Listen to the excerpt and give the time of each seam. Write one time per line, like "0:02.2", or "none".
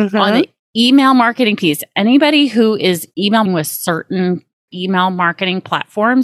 0:03.1
0:03.5
0:04.7